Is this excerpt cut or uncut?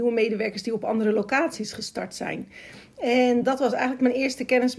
uncut